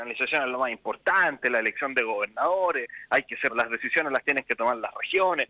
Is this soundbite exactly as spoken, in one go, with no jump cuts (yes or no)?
no